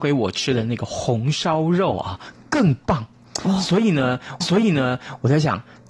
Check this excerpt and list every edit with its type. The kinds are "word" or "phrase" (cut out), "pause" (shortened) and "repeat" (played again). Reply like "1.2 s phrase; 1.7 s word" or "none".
4.4 s repeat